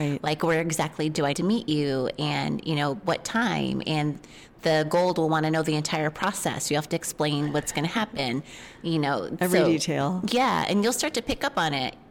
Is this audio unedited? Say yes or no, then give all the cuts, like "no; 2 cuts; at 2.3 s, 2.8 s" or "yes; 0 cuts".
no; 1 cut; at 1.3 s